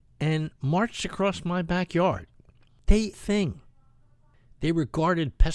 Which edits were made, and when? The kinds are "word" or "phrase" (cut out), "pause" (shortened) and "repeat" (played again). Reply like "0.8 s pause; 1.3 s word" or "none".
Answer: 3.1 s phrase